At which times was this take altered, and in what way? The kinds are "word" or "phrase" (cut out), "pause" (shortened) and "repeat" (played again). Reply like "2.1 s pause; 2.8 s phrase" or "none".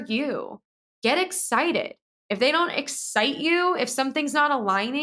none